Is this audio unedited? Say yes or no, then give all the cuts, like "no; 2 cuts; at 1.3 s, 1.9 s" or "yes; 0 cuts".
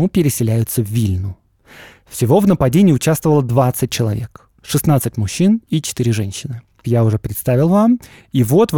no; 1 cut; at 6.8 s